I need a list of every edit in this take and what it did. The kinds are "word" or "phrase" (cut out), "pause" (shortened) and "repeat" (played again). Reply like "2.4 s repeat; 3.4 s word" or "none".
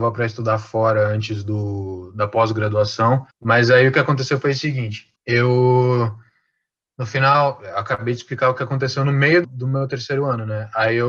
3.3 s pause; 5.2 s pause; 9.4 s word